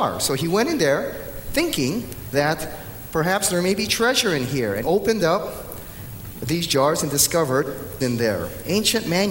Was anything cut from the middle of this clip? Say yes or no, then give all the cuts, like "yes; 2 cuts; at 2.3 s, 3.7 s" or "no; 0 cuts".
yes; 2 cuts; at 4.8 s, 8.0 s